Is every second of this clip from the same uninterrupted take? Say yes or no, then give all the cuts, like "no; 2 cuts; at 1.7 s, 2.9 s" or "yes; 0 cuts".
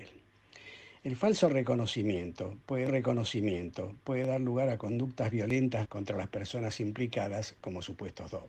no; 2 cuts; at 2.9 s, 5.8 s